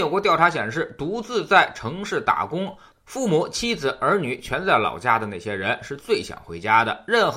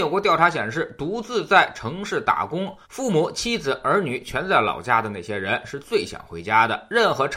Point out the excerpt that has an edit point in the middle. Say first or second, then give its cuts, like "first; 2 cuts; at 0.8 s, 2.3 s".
second; 1 cut; at 2.8 s